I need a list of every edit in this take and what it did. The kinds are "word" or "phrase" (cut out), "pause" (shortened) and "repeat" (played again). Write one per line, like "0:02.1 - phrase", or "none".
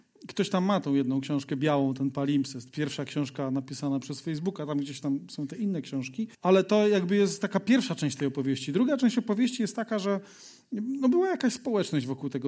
0:06.3 - pause

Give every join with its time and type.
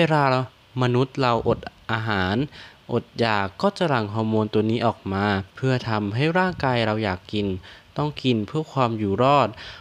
0:05.5 - pause

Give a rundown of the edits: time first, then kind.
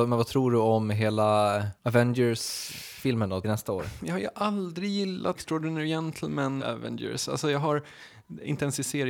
0:01.8 - pause
0:03.4 - word
0:05.4 - phrase
0:06.6 - word

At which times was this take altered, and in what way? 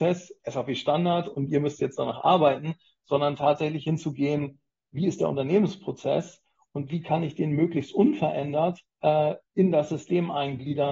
0:08.9 - pause

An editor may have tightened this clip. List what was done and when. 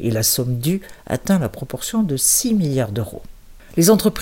none

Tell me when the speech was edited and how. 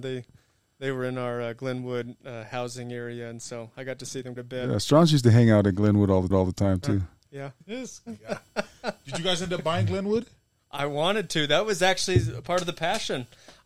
0:04.4 - word
0:06.3 - repeat
0:07.6 - pause

